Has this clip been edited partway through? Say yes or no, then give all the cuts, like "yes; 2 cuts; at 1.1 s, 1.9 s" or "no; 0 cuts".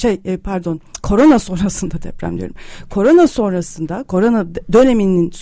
no; 0 cuts